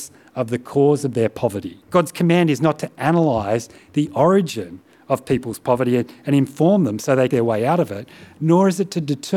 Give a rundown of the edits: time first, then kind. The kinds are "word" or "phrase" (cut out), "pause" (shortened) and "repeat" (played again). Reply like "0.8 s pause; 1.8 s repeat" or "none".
1.8 s pause; 7.3 s phrase